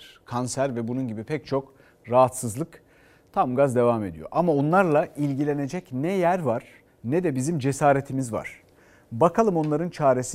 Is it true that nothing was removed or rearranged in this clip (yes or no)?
no